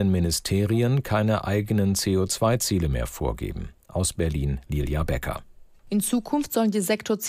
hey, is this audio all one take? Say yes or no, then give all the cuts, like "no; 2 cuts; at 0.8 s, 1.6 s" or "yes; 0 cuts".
yes; 0 cuts